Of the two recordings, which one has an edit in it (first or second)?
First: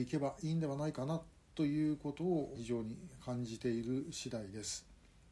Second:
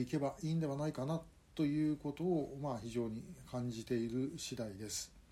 first